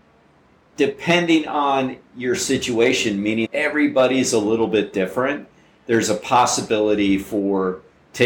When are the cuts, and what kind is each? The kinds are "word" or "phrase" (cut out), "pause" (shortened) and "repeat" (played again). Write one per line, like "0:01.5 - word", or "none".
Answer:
0:03.5 - word